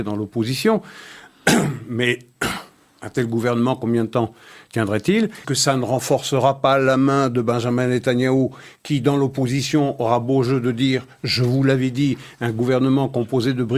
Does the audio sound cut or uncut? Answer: cut